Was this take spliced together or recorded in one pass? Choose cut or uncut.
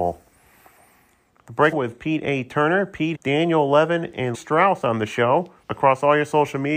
cut